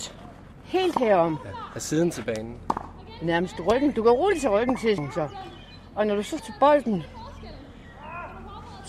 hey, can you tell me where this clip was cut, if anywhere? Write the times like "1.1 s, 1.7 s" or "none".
5.0 s, 6.4 s